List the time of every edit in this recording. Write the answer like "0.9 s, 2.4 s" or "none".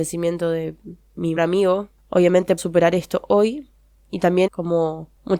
1.4 s, 2.6 s, 4.5 s